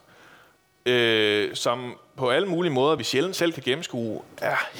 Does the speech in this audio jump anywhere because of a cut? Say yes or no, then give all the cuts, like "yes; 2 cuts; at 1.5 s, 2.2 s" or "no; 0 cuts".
no; 0 cuts